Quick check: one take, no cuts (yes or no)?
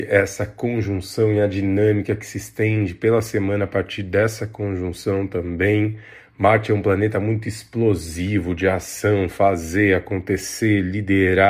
yes